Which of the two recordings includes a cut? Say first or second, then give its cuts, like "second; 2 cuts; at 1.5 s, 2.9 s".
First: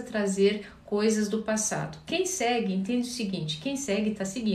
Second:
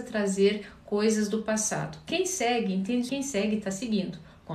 second; 1 cut; at 3.1 s